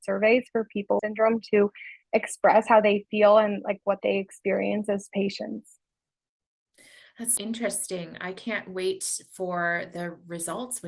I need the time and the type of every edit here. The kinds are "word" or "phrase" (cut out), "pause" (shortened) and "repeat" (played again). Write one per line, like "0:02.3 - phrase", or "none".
0:01.0 - phrase
0:07.4 - word